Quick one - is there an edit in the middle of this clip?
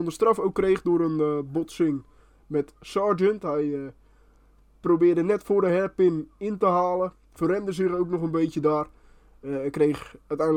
no; 0 cuts

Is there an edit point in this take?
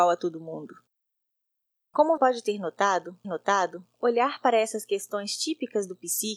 yes; 2 cuts; at 2.2 s, 3.2 s

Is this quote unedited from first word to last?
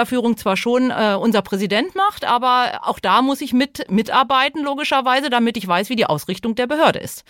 yes; 0 cuts

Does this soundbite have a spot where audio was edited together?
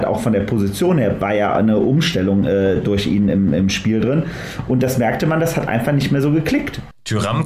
no; 0 cuts

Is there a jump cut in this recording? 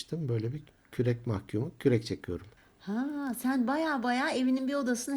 no; 0 cuts

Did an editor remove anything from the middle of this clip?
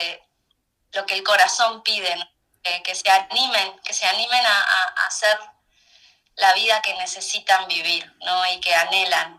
no; 0 cuts

